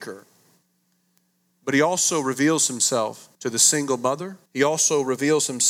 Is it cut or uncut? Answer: cut